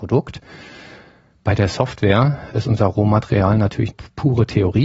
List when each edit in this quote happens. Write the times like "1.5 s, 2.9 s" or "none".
2.5 s, 3.9 s